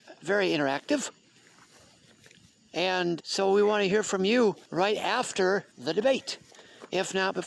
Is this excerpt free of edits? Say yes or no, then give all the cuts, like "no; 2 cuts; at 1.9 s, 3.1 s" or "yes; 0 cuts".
no; 3 cuts; at 3.2 s, 4.6 s, 5.7 s